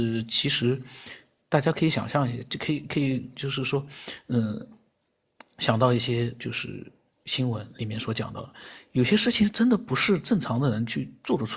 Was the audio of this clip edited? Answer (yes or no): no